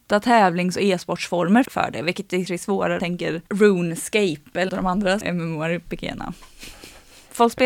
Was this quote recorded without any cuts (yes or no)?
no